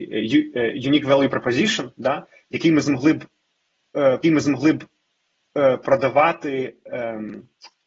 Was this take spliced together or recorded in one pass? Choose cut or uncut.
cut